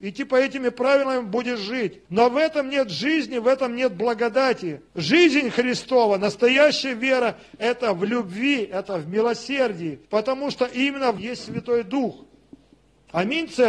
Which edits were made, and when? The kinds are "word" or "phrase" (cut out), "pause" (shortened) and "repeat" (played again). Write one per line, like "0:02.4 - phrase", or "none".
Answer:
0:02.1 - pause
0:04.9 - pause
0:10.0 - pause
0:11.2 - word